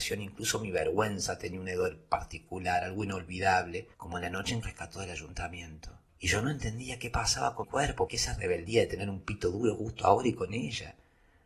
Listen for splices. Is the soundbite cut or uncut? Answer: cut